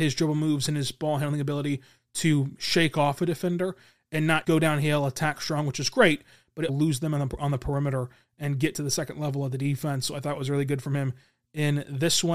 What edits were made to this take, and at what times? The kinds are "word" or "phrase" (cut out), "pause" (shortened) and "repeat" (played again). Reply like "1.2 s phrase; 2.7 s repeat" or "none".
4.4 s word; 6.7 s word